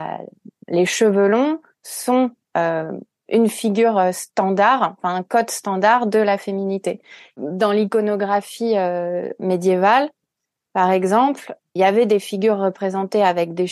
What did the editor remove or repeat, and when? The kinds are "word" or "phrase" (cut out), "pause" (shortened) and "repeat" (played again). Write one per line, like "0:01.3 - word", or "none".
none